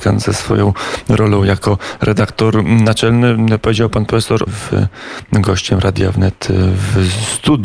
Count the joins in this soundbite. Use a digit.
1